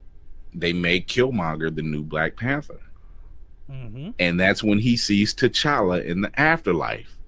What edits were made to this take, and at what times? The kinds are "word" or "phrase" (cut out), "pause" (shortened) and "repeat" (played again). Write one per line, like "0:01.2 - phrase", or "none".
none